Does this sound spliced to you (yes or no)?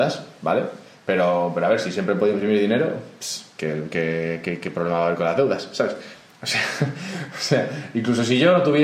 no